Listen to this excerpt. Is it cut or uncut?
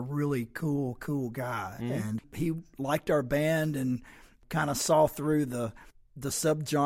cut